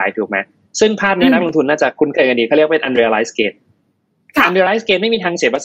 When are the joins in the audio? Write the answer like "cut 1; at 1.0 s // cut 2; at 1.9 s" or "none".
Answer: none